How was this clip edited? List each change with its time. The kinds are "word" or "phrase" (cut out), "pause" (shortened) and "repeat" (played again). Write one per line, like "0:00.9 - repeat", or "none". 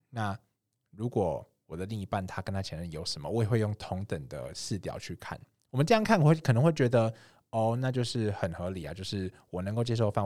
none